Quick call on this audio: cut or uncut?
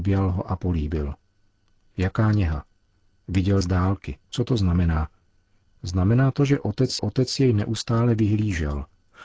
cut